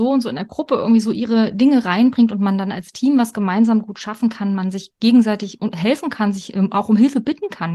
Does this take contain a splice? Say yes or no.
no